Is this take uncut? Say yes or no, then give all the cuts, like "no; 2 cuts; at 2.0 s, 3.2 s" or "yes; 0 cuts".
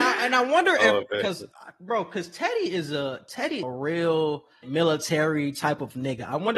no; 2 cuts; at 3.6 s, 4.6 s